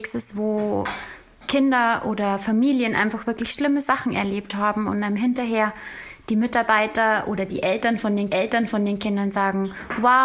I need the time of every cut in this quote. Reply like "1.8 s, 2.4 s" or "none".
8.3 s